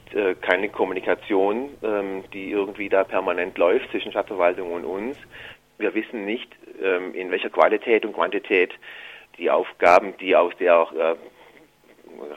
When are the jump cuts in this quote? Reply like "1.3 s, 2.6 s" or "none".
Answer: 9.3 s